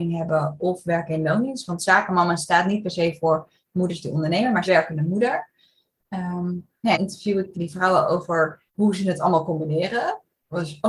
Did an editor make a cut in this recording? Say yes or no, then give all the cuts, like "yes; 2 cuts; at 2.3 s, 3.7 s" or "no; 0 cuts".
yes; 4 cuts; at 4.7 s, 6.9 s, 7.5 s, 8.7 s